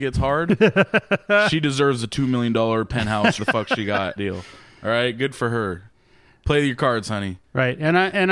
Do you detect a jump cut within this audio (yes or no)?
yes